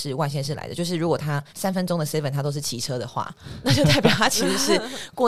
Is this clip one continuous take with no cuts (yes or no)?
no